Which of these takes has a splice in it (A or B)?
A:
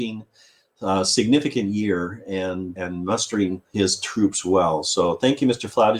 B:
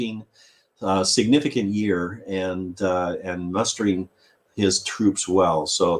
A